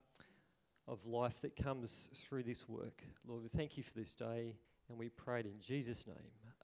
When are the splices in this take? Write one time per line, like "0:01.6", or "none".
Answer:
0:04.6